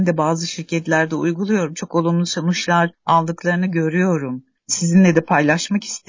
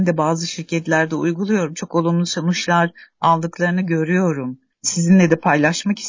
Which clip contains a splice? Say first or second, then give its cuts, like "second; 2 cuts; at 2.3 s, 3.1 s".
first; 1 cut; at 2.9 s